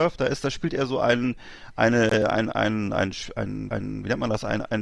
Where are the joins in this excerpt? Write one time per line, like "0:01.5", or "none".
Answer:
0:03.7